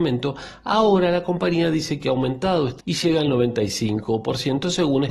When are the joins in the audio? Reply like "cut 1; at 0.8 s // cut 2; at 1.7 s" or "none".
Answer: cut 1; at 2.8 s